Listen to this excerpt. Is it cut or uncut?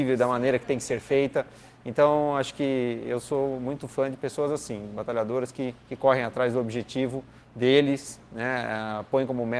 cut